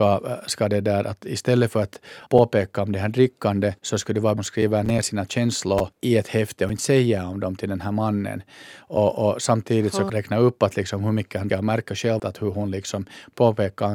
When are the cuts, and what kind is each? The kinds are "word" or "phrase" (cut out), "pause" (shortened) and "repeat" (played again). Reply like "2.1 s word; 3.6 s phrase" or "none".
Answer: 2.3 s pause; 3.8 s pause; 4.4 s phrase; 5.9 s pause; 10.1 s phrase; 11.5 s word; 12.2 s word